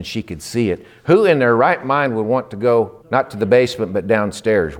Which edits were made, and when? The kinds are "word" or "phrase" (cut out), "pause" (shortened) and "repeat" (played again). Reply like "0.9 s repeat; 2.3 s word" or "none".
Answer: 3.0 s pause